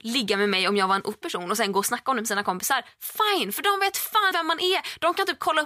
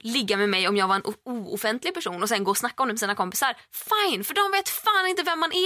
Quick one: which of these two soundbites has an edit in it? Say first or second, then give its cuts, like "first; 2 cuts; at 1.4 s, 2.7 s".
first; 2 cuts; at 1.2 s, 4.3 s